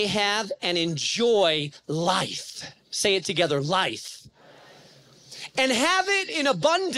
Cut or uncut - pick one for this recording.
uncut